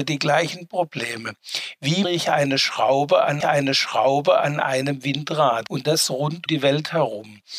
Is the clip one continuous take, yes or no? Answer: no